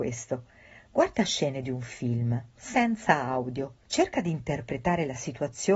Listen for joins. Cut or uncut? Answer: cut